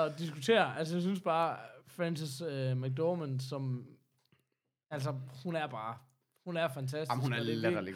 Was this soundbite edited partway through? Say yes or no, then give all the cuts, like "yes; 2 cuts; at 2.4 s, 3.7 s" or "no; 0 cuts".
no; 0 cuts